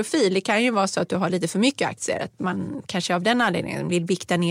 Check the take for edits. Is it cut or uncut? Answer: uncut